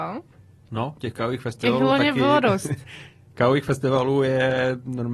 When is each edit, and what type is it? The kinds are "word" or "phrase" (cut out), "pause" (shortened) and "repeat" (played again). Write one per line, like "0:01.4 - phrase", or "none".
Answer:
none